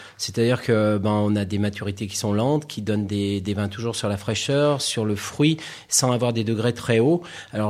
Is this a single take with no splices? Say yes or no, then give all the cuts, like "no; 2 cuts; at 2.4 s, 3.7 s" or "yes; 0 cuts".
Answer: yes; 0 cuts